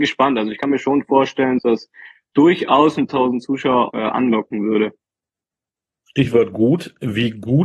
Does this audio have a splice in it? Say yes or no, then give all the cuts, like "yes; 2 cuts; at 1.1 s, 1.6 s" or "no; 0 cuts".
yes; 3 cuts; at 1.6 s, 3.1 s, 3.9 s